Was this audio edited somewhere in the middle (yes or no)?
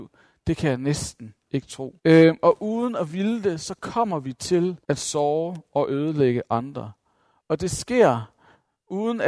yes